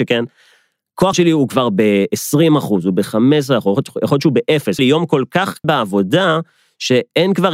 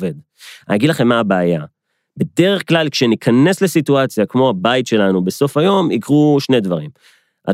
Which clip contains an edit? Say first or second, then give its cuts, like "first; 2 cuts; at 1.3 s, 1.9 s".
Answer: first; 3 cuts; at 1.1 s, 4.8 s, 5.6 s